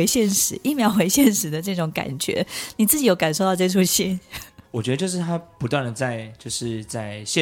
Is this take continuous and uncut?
no; 1 cut; at 4.7 s

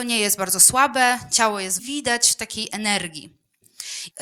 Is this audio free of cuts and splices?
no; 1 cut; at 1.8 s

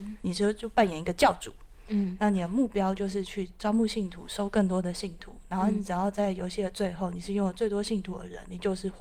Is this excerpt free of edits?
yes; 0 cuts

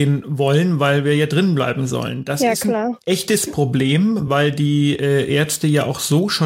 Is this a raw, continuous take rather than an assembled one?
yes; 0 cuts

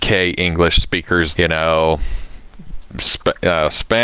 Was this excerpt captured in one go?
no; 1 cut; at 1.3 s

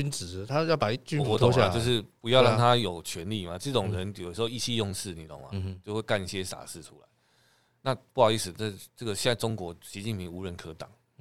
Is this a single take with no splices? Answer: yes; 0 cuts

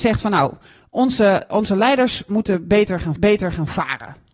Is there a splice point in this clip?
yes; 1 cut; at 3.2 s

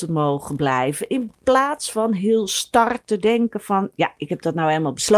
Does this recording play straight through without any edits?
yes; 0 cuts

